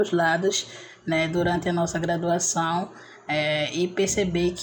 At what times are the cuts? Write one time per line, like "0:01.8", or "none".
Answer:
none